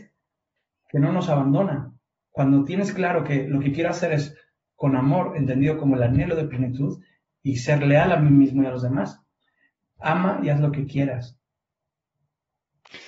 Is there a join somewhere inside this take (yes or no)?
no